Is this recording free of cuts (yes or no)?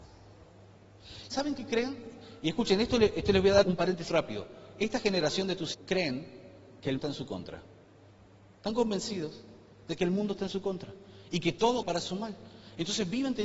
no